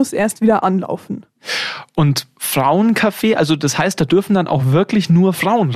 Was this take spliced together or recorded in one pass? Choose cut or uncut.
uncut